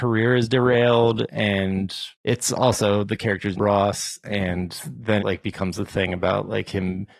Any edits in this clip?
yes; 3 cuts; at 2.1 s, 3.6 s, 5.2 s

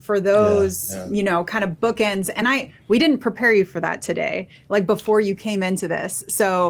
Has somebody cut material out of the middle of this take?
no; 0 cuts

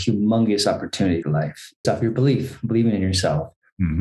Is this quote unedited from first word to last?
no; 2 cuts; at 1.2 s, 1.8 s

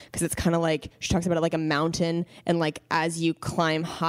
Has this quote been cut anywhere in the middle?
no; 0 cuts

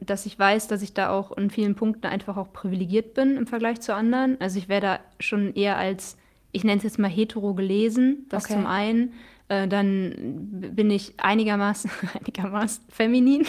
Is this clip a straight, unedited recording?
yes; 0 cuts

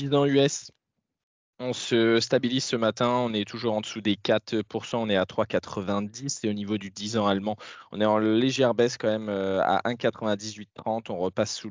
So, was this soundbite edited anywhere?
no; 0 cuts

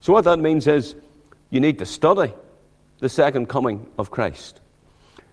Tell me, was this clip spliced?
no; 0 cuts

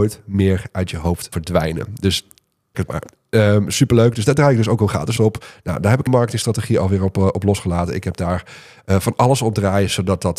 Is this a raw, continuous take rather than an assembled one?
no; 4 cuts; at 1.3 s, 2.7 s, 5.2 s, 6.1 s

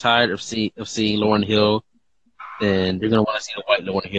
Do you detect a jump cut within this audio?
no; 0 cuts

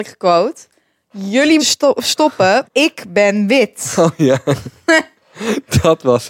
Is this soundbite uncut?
no; 2 cuts; at 1.6 s, 2.6 s

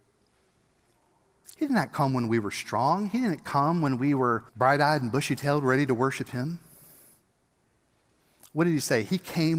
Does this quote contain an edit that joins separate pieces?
yes; 1 cut; at 4.5 s

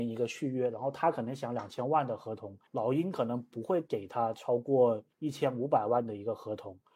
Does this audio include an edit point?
yes; 2 cuts; at 2.7 s, 5.1 s

